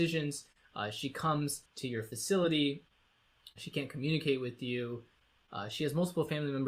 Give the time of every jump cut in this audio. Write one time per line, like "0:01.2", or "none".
0:01.7